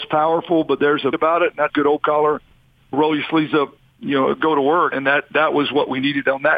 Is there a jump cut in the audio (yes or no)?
yes